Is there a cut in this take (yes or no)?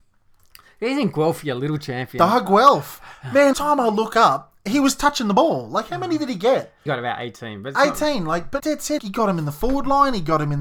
yes